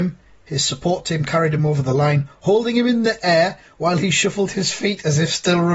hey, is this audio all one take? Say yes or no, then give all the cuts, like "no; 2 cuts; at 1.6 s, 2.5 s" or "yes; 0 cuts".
yes; 0 cuts